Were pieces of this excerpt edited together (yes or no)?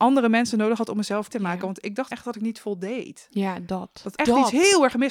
yes